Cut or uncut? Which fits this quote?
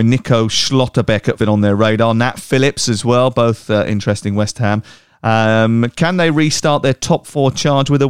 cut